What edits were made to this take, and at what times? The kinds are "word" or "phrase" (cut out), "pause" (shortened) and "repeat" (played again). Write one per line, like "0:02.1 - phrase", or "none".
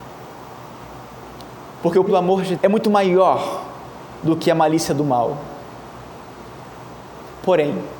0:02.1 - word
0:02.6 - word